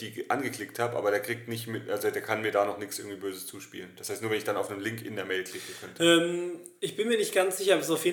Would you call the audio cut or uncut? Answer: uncut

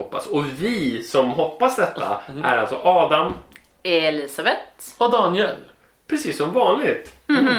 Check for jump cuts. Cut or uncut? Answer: uncut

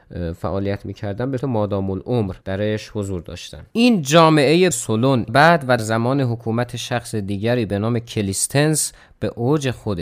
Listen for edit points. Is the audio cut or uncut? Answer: cut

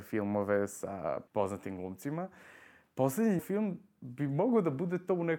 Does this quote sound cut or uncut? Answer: cut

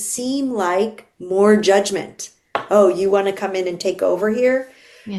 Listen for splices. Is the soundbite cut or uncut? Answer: uncut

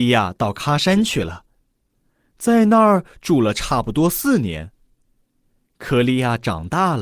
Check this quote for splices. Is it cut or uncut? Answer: uncut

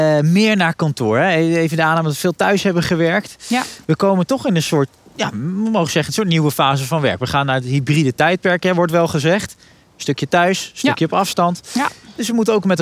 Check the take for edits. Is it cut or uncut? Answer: uncut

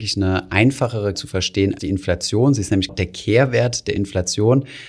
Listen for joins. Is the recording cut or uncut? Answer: cut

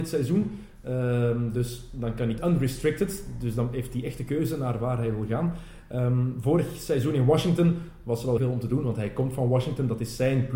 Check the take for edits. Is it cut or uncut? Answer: cut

